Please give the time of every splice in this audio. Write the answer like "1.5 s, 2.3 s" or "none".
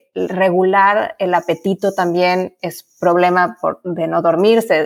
none